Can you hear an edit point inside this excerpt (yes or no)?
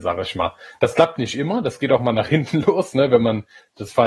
no